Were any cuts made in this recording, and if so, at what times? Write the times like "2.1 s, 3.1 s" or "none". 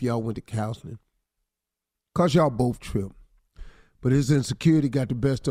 2.8 s